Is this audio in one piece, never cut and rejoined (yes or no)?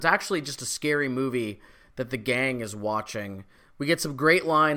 yes